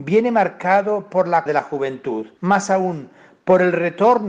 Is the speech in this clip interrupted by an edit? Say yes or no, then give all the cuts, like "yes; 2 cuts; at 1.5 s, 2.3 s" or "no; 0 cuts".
yes; 1 cut; at 1.5 s